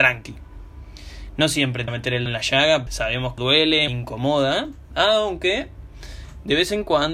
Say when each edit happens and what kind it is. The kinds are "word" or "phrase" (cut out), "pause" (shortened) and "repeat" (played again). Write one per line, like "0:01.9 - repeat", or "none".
0:01.9 - word
0:02.3 - word
0:02.9 - word
0:03.4 - word
0:03.9 - word